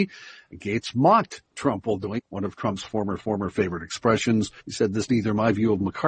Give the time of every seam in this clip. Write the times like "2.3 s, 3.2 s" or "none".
2.2 s, 3.2 s, 4.6 s, 5.1 s